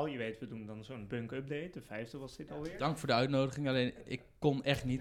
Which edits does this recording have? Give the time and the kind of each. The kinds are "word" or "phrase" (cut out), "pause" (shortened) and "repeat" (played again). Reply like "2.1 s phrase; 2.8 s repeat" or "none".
none